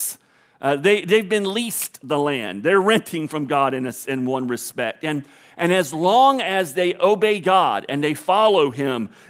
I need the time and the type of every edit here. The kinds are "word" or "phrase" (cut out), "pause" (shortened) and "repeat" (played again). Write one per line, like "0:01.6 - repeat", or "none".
none